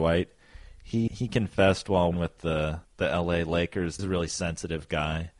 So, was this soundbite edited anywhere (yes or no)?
yes